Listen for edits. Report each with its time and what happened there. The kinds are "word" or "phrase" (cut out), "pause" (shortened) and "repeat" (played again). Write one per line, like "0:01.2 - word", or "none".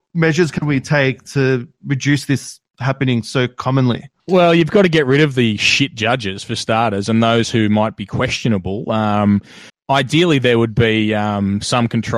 0:04.2 - pause
0:09.7 - pause

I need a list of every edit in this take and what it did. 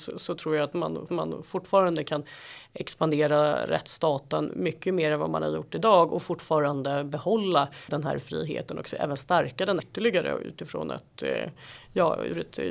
0:01.1 - repeat
0:07.9 - word
0:09.8 - word

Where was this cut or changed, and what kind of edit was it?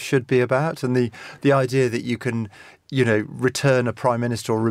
none

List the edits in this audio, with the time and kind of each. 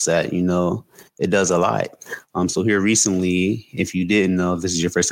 none

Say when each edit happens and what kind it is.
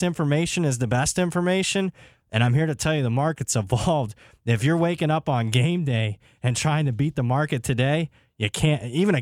none

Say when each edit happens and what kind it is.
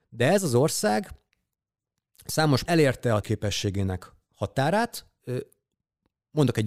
0:02.6 - word
0:03.2 - word

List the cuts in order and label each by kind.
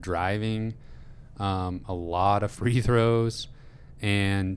none

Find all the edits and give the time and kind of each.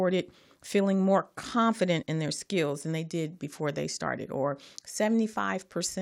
0:02.0 - word

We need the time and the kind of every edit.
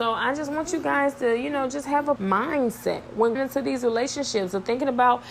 0:02.2 - word
0:03.4 - word

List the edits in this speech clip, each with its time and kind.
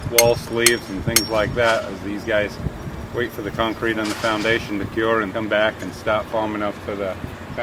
0:05.3 - word

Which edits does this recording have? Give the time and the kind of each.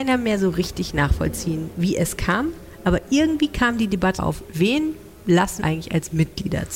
0:04.2 - word
0:05.6 - word

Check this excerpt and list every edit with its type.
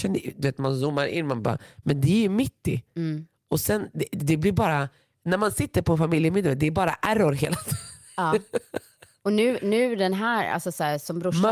none

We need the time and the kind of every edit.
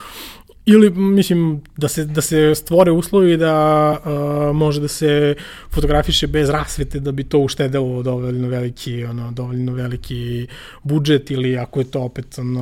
none

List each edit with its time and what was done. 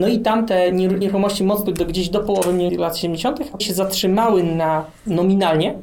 0:01.0 - word
0:01.7 - word
0:02.7 - word
0:03.6 - word

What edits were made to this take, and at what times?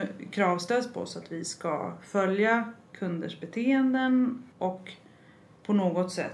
0:04.5 - pause

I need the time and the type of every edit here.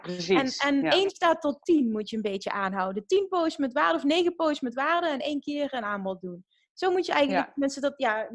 none

